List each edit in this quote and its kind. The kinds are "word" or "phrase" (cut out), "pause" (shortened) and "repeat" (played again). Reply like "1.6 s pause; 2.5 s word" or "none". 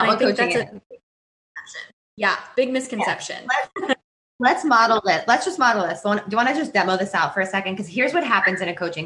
none